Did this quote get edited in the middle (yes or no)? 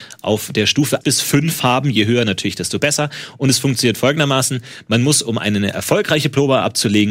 yes